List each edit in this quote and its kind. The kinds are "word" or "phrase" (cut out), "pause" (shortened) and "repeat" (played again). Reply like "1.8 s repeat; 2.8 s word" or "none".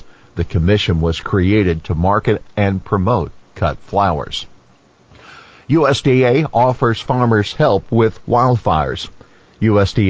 none